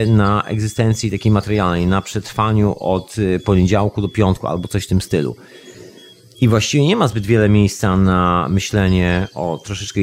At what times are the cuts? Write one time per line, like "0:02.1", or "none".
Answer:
none